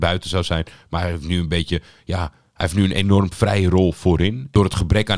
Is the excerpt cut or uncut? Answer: uncut